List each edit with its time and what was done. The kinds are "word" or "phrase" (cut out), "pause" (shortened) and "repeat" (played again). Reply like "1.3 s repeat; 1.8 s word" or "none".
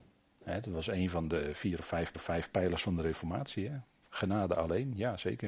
1.5 s word; 2.1 s repeat